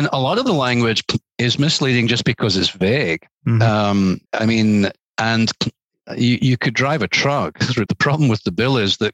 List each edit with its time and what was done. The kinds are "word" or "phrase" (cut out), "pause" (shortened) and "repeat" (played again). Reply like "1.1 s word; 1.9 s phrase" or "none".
3.3 s pause; 4.3 s pause; 5.0 s pause; 7.9 s word